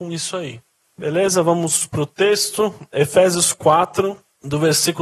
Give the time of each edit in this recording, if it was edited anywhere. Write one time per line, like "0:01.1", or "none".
none

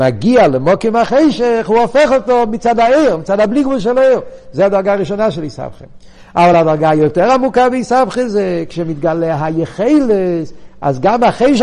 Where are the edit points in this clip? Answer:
none

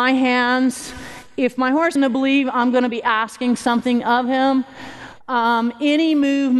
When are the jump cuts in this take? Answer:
0:02.0

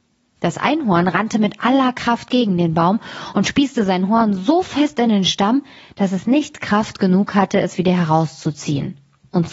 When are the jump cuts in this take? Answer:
none

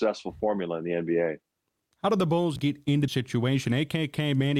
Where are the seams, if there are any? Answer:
0:02.6
0:03.1

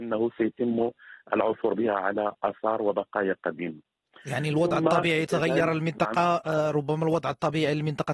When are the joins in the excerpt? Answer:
none

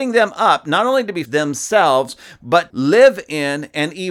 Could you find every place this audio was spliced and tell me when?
0:01.3
0:02.7

